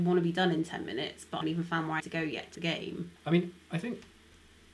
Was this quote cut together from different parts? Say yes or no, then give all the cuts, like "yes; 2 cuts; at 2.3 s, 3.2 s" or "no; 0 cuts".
yes; 4 cuts; at 1.4 s, 2.0 s, 2.5 s, 3.2 s